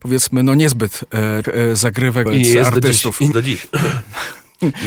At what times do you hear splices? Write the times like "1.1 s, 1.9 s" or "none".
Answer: 1.4 s, 2.3 s, 3.3 s